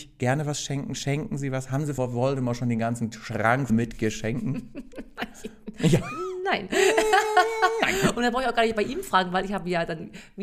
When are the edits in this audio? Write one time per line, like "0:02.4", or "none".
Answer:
0:02.0
0:03.7